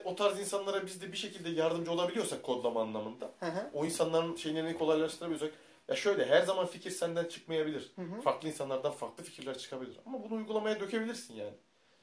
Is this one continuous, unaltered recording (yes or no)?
yes